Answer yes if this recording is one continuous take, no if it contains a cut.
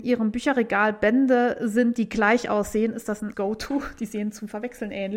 no